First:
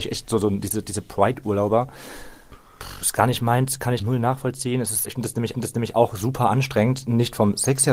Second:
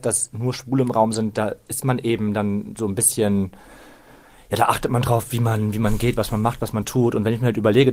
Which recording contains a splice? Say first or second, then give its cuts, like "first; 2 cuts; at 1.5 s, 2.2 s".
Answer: first; 3 cuts; at 4.0 s, 5.0 s, 5.5 s